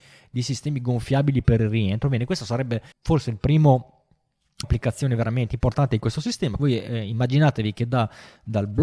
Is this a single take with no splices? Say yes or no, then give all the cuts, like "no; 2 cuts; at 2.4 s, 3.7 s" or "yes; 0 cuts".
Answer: no; 3 cuts; at 2.9 s, 4.6 s, 6.6 s